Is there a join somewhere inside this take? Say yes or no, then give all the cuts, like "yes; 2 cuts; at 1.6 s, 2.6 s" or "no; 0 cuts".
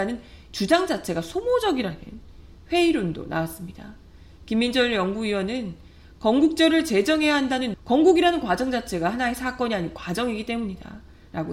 yes; 1 cut; at 7.7 s